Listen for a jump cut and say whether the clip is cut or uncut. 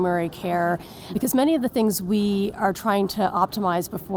uncut